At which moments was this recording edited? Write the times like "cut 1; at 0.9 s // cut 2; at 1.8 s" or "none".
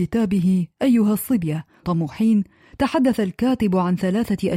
cut 1; at 1.8 s